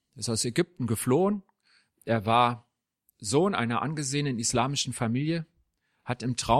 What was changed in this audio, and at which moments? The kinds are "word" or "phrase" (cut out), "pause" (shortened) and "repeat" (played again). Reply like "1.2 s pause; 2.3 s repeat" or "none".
none